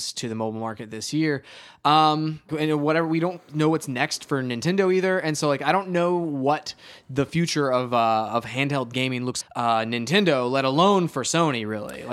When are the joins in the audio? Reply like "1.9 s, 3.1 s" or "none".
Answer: 2.5 s, 9.4 s